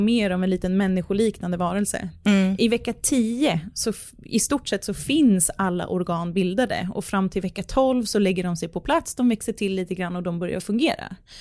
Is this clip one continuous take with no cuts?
yes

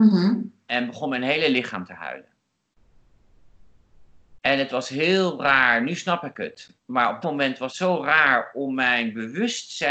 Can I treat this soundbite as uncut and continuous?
no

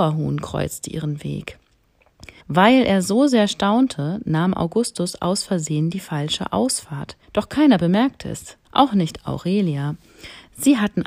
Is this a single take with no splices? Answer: no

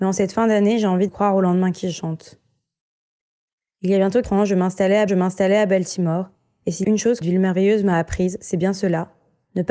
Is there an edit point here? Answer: yes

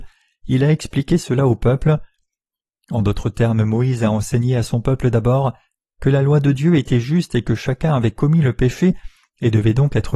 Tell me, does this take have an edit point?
no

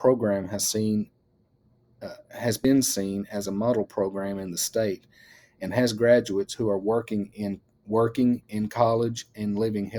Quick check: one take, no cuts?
yes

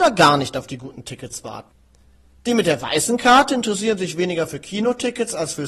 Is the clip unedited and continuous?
yes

